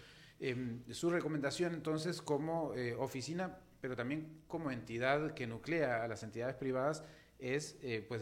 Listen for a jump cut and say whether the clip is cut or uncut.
uncut